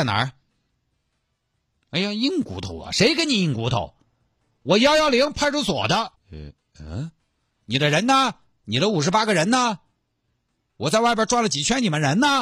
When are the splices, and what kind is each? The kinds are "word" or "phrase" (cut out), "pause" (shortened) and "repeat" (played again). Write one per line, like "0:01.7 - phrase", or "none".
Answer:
0:06.2 - pause